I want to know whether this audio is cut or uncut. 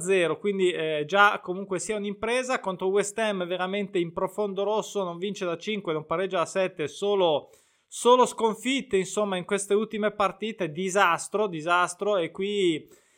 uncut